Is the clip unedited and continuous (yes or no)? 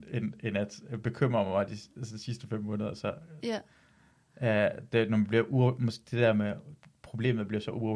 yes